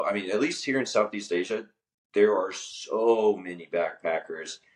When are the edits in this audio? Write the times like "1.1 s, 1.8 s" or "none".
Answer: none